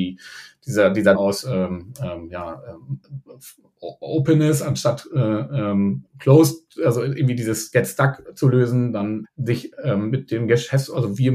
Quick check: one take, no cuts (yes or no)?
no